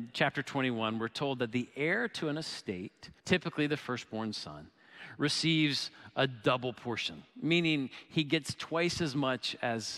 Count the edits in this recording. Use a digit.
2